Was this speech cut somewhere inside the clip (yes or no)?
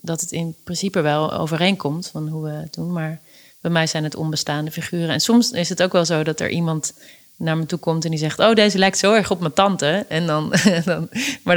no